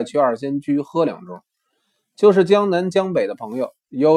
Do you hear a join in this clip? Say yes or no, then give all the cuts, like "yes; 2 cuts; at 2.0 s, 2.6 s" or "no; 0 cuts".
no; 0 cuts